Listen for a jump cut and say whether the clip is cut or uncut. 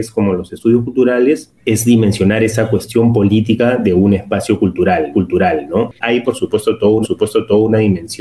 cut